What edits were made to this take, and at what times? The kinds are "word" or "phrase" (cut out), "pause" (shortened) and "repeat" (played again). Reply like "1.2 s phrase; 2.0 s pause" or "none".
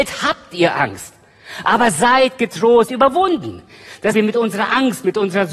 2.9 s phrase; 4.1 s phrase